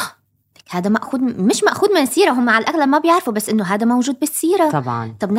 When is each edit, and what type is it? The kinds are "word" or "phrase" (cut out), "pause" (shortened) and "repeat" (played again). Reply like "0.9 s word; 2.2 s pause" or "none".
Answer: none